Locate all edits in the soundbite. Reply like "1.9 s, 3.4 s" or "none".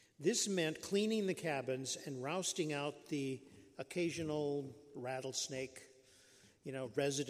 none